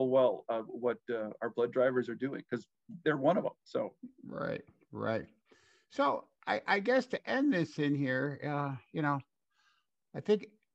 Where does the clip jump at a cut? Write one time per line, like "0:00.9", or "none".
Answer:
none

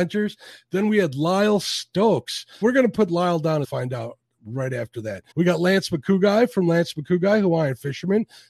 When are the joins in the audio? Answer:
0:02.6
0:03.6
0:05.3

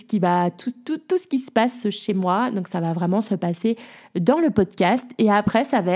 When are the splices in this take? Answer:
none

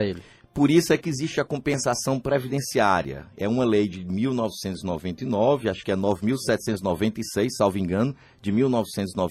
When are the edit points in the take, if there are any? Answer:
none

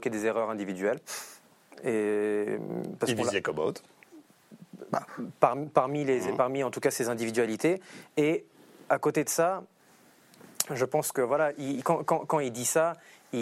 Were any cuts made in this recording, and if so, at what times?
none

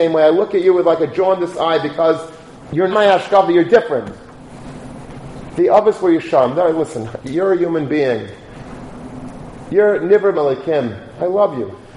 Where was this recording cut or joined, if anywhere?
0:02.9
0:10.3

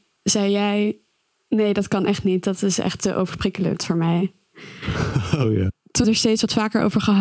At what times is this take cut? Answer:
0:06.0

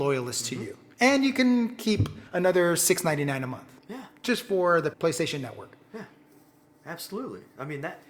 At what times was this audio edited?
0:02.3
0:03.8
0:04.9

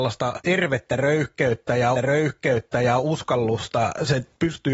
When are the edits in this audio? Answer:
0:01.9

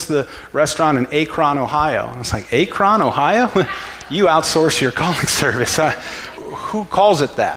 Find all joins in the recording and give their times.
0:06.4

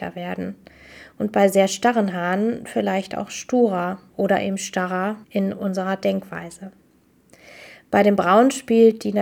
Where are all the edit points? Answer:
0:05.2

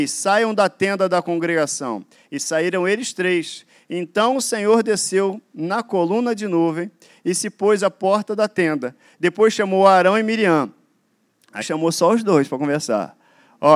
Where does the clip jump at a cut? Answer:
0:11.6

